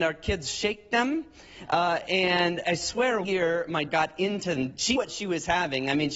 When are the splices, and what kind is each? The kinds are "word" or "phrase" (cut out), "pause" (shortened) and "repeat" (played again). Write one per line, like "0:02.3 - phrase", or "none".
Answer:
0:02.6 - word
0:03.2 - word
0:03.9 - word
0:04.6 - word
0:05.0 - word